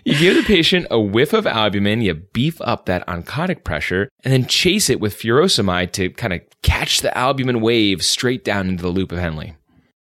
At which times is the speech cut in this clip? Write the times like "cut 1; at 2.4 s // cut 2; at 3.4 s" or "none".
cut 1; at 4.1 s